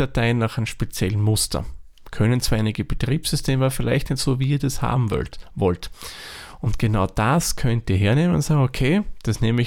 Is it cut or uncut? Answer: uncut